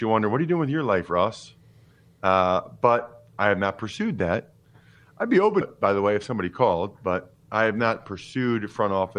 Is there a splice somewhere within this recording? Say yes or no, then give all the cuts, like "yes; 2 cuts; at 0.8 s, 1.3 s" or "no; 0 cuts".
yes; 1 cut; at 5.6 s